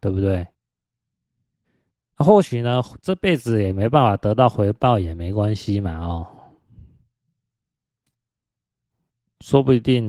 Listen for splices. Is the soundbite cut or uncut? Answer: uncut